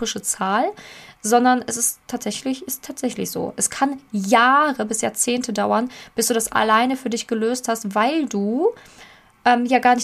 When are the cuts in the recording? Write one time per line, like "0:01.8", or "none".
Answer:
none